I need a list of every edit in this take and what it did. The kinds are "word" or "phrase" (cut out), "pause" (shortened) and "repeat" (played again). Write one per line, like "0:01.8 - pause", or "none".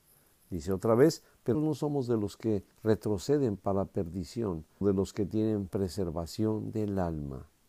0:01.5 - word
0:02.7 - pause
0:04.8 - word
0:05.7 - phrase